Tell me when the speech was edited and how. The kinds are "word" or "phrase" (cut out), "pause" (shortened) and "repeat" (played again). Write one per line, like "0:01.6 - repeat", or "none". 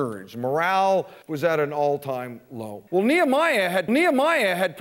0:01.2 - pause
0:02.9 - pause
0:03.9 - repeat